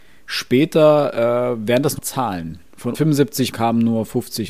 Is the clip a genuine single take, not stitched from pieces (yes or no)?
no